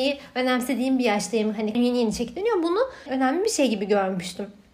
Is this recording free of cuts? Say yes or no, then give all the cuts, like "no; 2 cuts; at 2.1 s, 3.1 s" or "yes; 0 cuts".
no; 2 cuts; at 1.7 s, 3.1 s